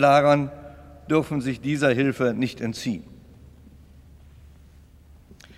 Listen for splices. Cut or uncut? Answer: uncut